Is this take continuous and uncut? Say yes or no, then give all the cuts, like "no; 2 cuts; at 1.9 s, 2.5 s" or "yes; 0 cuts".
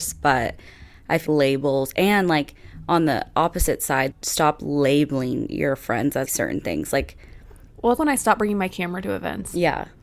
no; 4 cuts; at 1.3 s, 4.1 s, 6.3 s, 8.0 s